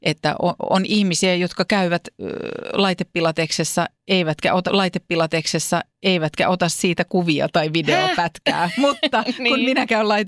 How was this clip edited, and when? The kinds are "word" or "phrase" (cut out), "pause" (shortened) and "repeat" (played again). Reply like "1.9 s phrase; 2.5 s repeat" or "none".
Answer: 4.7 s repeat

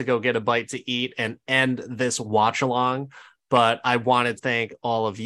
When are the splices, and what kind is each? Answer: 4.4 s word

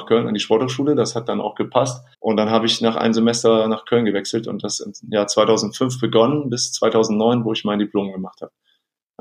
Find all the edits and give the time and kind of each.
2.1 s pause

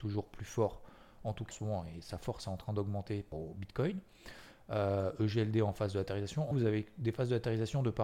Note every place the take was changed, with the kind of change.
1.5 s word; 3.3 s word; 6.5 s word

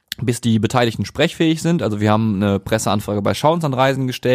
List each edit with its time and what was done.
none

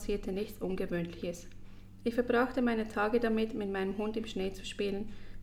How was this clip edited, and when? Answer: none

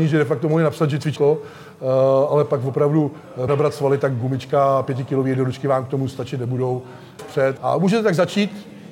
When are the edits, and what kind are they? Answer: 1.2 s phrase; 3.5 s phrase; 7.2 s phrase; 7.6 s word

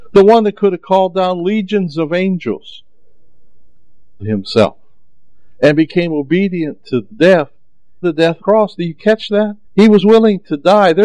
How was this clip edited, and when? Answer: 4.2 s word; 8.0 s word; 8.4 s phrase; 9.6 s pause

